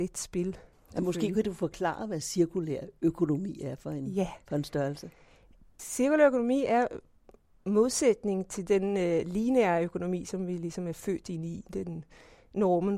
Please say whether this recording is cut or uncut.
uncut